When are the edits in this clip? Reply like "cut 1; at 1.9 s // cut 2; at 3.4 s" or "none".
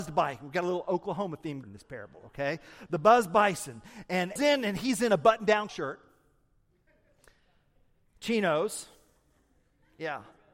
cut 1; at 1.6 s // cut 2; at 4.4 s // cut 3; at 5.7 s